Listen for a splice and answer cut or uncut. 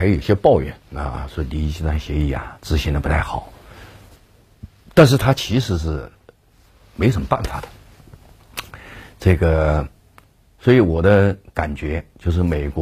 uncut